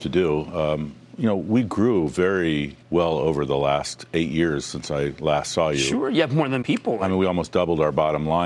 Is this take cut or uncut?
cut